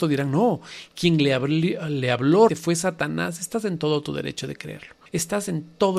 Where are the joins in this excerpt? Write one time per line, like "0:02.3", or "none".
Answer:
0:02.5
0:05.1